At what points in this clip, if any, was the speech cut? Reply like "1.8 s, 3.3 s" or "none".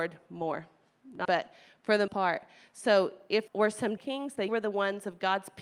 1.2 s, 2.1 s, 3.5 s, 4.0 s, 4.5 s